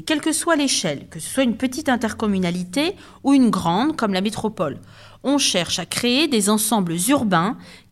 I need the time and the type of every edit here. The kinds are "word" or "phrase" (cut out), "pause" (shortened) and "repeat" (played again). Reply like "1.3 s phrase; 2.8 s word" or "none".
none